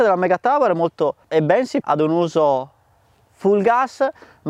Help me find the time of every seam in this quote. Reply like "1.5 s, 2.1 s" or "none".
1.3 s, 1.8 s